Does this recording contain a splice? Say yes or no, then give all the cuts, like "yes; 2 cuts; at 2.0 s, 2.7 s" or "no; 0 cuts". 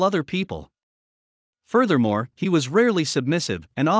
no; 0 cuts